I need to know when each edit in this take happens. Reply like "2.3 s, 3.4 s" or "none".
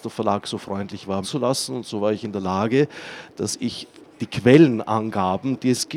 1.2 s